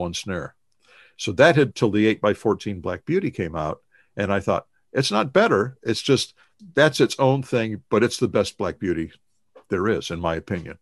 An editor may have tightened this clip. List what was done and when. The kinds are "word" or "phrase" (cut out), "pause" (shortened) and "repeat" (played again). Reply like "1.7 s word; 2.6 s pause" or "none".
1.7 s phrase